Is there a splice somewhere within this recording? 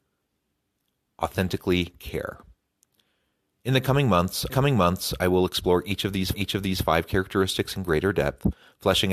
yes; 2 cuts; at 4.5 s, 6.3 s

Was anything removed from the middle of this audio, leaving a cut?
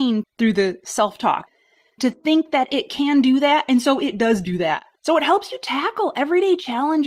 yes; 1 cut; at 5.0 s

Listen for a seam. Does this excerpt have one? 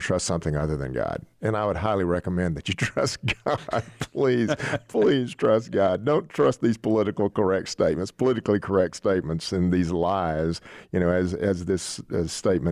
no; 0 cuts

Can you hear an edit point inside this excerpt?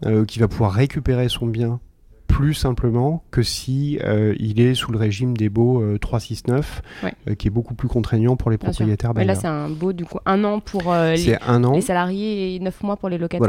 no; 0 cuts

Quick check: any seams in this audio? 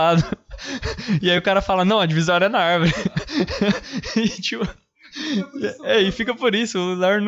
no; 0 cuts

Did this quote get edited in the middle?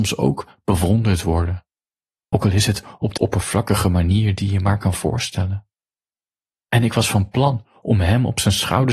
yes; 1 cut; at 3.2 s

